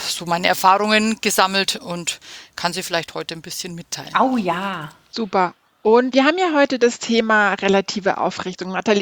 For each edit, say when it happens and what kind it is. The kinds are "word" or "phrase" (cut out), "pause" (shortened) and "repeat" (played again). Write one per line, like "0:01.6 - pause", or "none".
0:06.1 - word